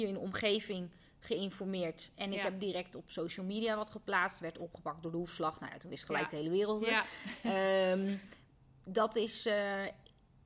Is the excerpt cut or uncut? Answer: uncut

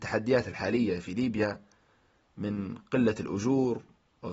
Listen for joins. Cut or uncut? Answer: uncut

